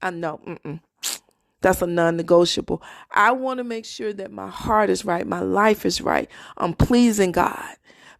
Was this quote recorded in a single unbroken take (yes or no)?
yes